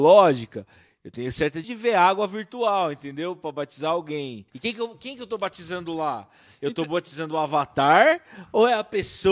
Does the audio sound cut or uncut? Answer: cut